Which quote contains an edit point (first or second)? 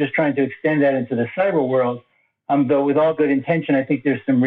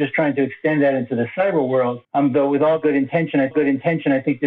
second